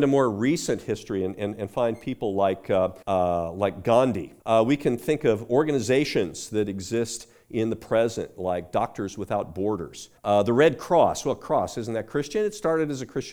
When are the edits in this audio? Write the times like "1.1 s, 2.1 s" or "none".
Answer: 3.0 s, 4.4 s, 10.2 s